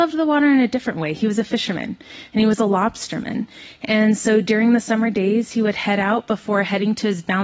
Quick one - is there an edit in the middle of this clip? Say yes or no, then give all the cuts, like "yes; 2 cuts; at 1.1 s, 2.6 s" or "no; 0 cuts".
no; 0 cuts